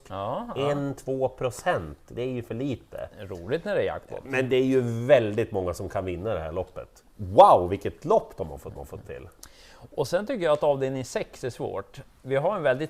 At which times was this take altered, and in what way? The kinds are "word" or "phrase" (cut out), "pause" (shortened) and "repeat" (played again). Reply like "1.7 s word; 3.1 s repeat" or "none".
8.8 s repeat

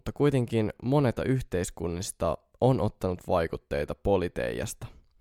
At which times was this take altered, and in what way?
1.2 s word

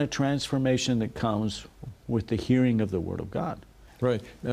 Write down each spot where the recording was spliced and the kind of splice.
none

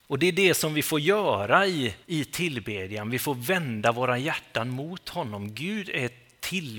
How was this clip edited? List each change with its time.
2.0 s pause

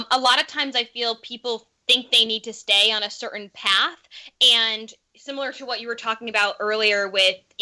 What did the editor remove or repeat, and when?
none

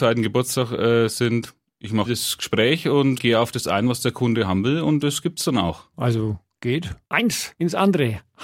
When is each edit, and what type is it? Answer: 2.0 s word; 3.2 s word

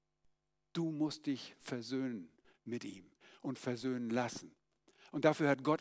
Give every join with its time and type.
none

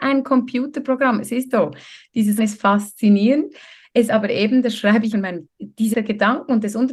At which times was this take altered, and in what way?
1.5 s word; 2.4 s word; 4.1 s word; 5.1 s word; 5.5 s word; 5.9 s word

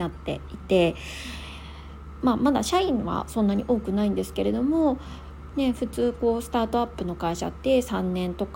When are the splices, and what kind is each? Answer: none

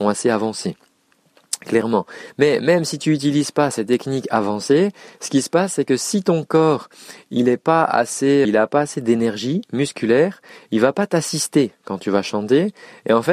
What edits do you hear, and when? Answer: 8.4 s word

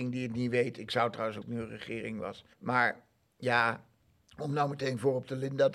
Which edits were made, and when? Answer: 1.4 s phrase; 2.5 s pause; 4.0 s pause

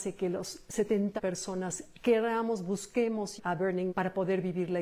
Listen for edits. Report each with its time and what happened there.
1.2 s word; 3.4 s word; 3.9 s word

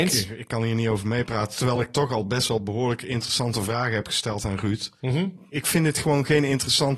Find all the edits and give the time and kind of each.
none

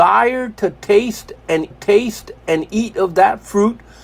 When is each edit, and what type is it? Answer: 1.7 s repeat

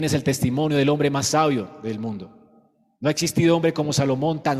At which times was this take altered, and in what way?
none

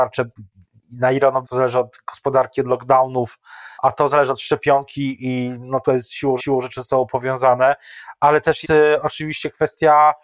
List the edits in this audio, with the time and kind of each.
1.4 s word; 3.7 s pause; 5.8 s word; 6.4 s repeat; 8.6 s word

